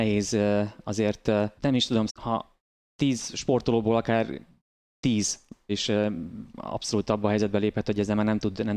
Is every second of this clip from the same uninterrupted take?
no; 3 cuts; at 1.6 s, 2.1 s, 5.7 s

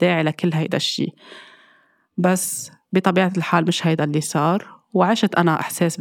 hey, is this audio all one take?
yes; 0 cuts

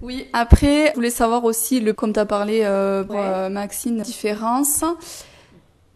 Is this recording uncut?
no; 4 cuts; at 0.9 s, 1.9 s, 3.1 s, 4.0 s

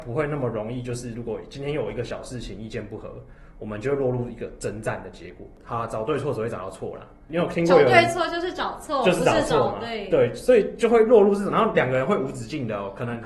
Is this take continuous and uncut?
yes; 0 cuts

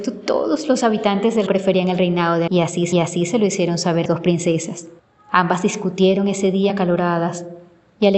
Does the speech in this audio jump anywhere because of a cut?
yes; 6 cuts; at 1.5 s, 2.5 s, 2.9 s, 4.1 s, 5.0 s, 6.7 s

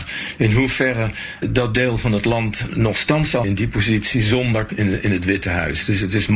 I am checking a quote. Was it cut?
yes; 4 cuts; at 1.4 s, 2.7 s, 3.4 s, 4.7 s

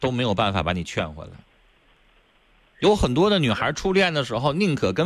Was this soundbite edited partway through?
no; 0 cuts

